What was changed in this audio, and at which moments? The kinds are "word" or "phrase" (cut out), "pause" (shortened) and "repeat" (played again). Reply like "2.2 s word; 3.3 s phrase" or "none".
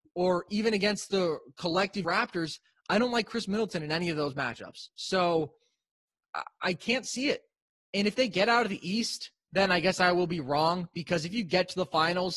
2.0 s phrase